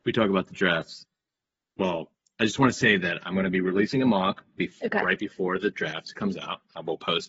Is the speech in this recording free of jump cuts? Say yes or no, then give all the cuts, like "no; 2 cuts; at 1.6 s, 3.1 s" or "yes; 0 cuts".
yes; 0 cuts